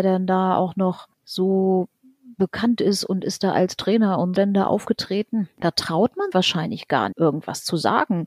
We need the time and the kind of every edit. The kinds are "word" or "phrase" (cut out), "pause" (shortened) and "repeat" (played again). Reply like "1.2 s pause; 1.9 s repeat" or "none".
1.1 s pause; 4.4 s word; 6.3 s word; 7.1 s word